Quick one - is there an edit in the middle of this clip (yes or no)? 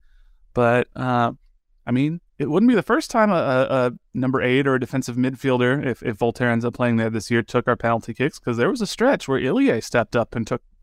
no